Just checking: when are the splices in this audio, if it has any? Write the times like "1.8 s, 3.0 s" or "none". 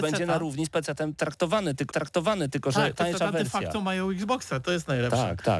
1.9 s, 2.9 s